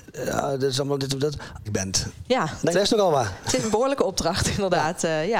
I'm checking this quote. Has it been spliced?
yes; 2 cuts; at 1.7 s, 2.7 s

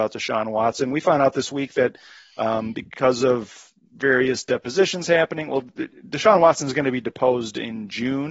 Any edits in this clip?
no; 0 cuts

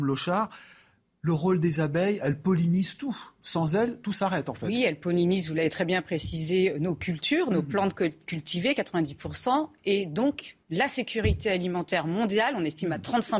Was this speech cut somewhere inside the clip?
yes; 1 cut; at 10.6 s

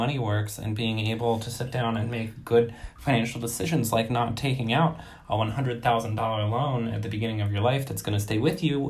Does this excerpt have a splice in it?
no; 0 cuts

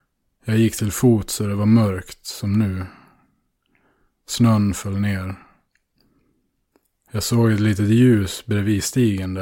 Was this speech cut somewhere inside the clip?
no; 0 cuts

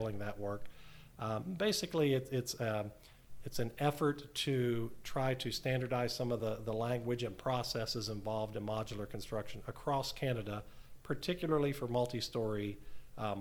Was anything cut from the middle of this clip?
no; 0 cuts

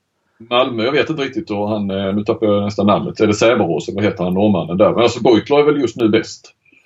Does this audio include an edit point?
no; 0 cuts

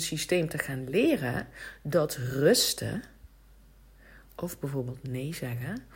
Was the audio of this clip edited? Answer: no; 0 cuts

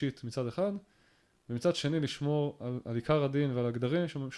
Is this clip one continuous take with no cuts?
yes; 0 cuts

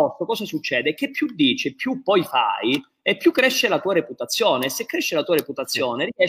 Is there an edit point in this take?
no; 0 cuts

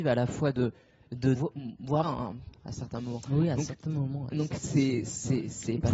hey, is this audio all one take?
no; 2 cuts; at 1.4 s, 2.0 s

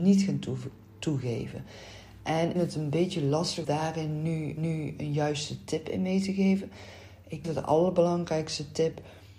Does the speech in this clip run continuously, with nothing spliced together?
no; 4 cuts; at 2.6 s, 3.6 s, 4.6 s, 7.4 s

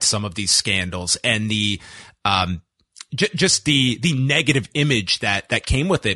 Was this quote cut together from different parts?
no; 0 cuts

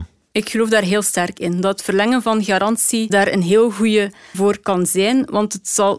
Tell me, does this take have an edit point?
yes; 2 cuts; at 3.1 s, 4.3 s

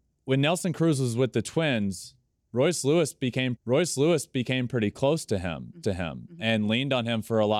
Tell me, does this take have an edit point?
yes; 2 cuts; at 3.6 s, 5.8 s

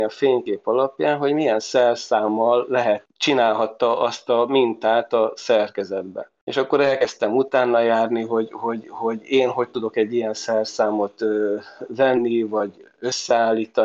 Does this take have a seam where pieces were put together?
no; 0 cuts

